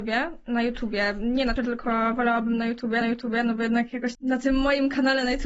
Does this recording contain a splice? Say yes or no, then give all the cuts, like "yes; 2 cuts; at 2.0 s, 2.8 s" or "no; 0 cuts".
yes; 3 cuts; at 1.6 s, 3.0 s, 4.1 s